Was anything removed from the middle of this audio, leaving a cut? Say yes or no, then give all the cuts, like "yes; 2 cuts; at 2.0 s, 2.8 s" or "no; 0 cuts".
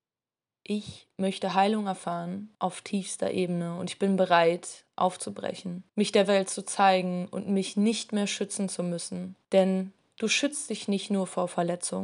yes; 3 cuts; at 2.5 s, 5.9 s, 9.4 s